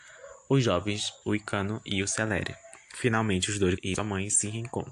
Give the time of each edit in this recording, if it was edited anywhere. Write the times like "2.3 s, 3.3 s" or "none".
1.2 s, 3.8 s